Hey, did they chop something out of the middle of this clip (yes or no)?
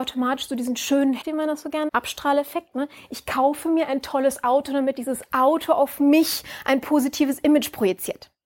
yes